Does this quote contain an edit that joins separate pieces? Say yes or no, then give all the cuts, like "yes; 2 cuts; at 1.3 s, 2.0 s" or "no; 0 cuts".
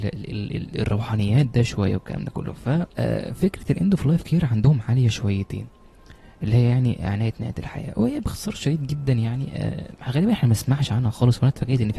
no; 0 cuts